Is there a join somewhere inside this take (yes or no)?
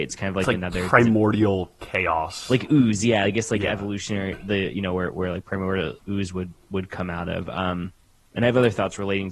no